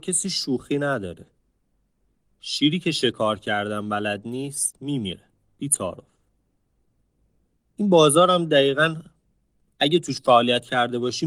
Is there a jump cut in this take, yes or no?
no